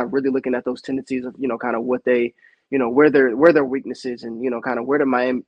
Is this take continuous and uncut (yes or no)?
yes